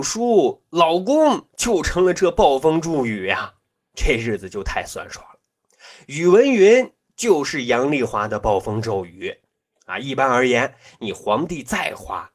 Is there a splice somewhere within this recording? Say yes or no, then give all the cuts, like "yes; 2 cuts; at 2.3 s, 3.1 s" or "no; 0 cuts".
no; 0 cuts